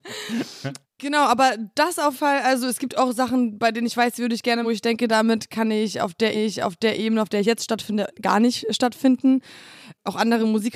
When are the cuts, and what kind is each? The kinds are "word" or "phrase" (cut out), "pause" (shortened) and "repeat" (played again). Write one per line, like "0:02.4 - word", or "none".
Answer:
0:02.1 - word
0:04.6 - word
0:06.3 - repeat